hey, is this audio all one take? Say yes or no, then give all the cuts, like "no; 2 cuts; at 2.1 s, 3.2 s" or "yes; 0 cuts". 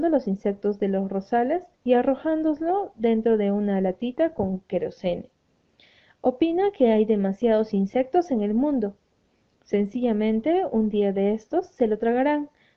no; 1 cut; at 1.7 s